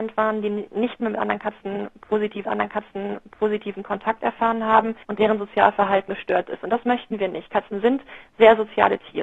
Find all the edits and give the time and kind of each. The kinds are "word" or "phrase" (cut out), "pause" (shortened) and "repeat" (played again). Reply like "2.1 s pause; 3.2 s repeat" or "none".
2.5 s repeat; 5.0 s pause; 6.1 s word

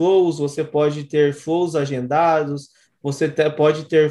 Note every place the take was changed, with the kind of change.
none

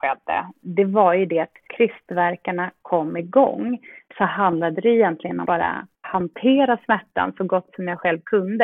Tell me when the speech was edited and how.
1.7 s phrase; 5.4 s word; 6.0 s word

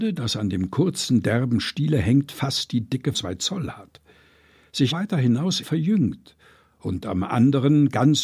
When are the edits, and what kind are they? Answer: 3.1 s word; 4.9 s word; 5.6 s word

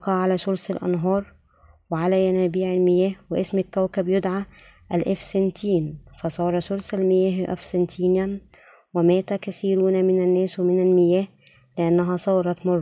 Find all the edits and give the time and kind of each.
none

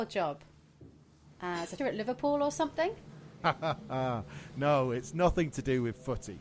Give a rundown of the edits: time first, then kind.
1.8 s word

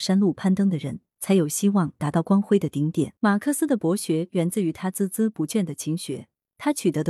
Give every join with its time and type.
3.2 s pause

